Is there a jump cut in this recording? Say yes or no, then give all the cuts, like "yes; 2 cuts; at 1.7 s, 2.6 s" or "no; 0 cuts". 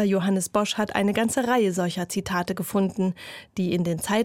no; 0 cuts